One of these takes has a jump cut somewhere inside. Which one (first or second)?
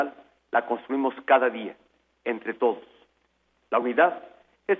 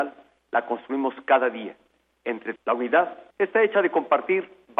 second